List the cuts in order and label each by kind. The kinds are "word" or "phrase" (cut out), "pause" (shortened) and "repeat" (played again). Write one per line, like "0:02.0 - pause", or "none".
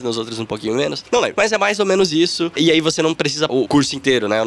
0:03.5 - word